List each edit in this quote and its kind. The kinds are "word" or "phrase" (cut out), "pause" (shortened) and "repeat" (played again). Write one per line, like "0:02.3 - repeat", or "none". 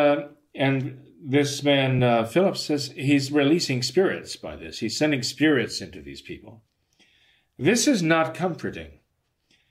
none